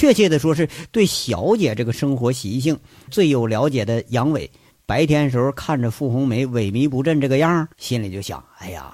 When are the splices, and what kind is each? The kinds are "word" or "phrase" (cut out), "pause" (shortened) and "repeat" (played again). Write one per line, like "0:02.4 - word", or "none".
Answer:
0:03.1 - word
0:07.7 - pause